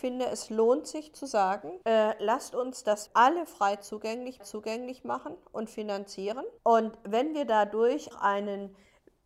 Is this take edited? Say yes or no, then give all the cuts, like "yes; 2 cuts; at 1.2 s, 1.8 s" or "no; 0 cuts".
yes; 5 cuts; at 1.8 s, 3.1 s, 4.4 s, 6.6 s, 8.1 s